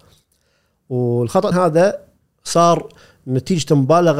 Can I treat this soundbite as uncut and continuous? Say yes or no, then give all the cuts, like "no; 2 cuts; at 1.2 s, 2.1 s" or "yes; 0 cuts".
no; 1 cut; at 1.5 s